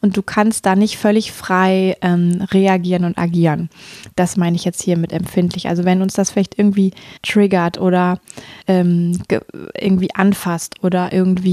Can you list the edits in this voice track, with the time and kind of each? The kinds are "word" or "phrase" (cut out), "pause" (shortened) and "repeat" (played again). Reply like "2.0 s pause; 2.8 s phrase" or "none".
7.2 s pause; 8.6 s pause